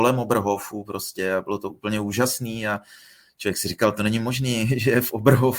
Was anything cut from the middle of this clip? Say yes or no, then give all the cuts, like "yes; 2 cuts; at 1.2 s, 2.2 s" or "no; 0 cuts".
no; 0 cuts